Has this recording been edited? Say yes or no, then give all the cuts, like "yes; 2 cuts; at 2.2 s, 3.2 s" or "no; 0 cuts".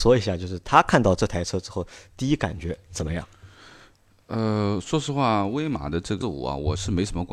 yes; 1 cut; at 6.2 s